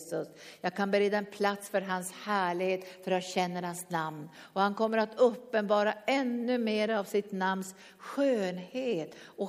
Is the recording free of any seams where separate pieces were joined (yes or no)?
yes